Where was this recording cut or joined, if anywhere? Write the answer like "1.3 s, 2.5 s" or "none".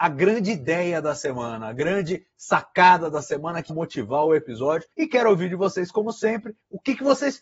3.7 s, 4.9 s